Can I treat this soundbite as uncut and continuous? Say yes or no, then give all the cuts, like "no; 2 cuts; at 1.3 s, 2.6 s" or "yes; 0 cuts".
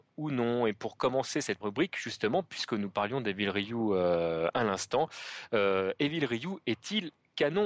no; 1 cut; at 1.6 s